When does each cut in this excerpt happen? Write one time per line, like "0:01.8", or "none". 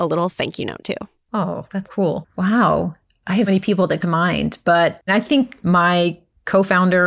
0:01.8
0:03.5
0:04.0
0:05.1

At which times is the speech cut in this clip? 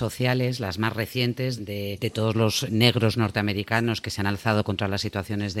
0:01.6

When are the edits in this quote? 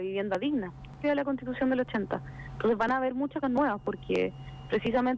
0:01.0
0:03.4

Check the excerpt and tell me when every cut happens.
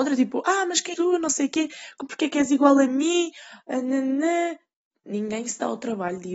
0:00.9
0:04.9

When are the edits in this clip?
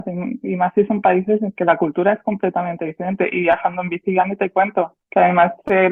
0:05.0

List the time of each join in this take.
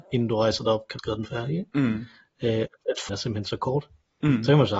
0:01.0
0:03.1

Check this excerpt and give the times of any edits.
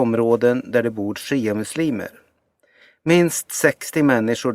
none

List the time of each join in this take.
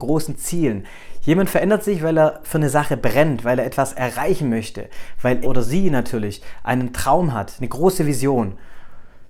0:05.4

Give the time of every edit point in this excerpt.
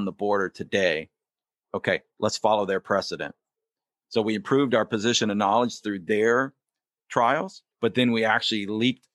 0:07.7

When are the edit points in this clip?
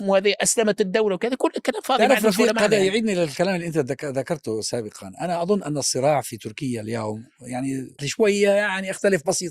0:08.0

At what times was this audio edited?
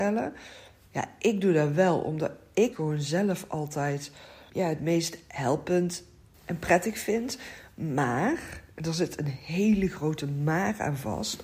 0:02.7
0:04.5
0:06.3

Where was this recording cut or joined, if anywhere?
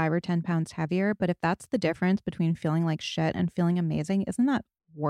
none

